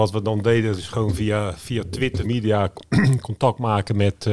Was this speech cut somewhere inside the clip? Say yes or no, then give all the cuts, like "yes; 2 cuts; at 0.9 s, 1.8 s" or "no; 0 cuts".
yes; 1 cut; at 2.2 s